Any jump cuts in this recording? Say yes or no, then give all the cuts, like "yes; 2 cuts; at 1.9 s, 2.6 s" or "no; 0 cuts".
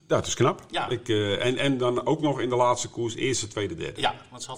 no; 0 cuts